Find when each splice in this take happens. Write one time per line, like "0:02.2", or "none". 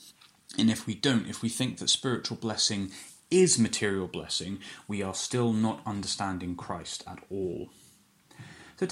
none